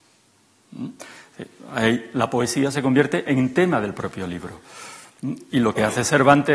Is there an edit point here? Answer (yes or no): no